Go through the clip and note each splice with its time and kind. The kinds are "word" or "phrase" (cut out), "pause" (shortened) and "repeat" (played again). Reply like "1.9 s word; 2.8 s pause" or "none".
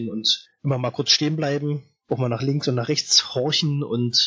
none